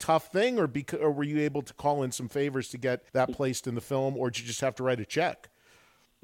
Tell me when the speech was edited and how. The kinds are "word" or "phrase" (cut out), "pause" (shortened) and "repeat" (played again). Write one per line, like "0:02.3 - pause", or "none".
0:03.1 - pause